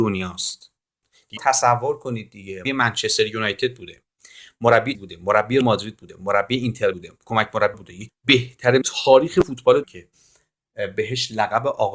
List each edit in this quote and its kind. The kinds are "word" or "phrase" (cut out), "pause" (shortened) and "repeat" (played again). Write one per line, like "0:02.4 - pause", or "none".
0:01.4 - word
0:02.6 - word
0:04.9 - word
0:05.6 - word
0:06.9 - word
0:07.7 - word
0:08.1 - word
0:08.8 - word
0:09.8 - word